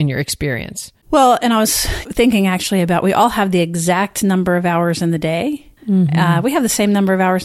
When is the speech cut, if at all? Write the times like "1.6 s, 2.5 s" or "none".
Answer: 1.0 s, 5.8 s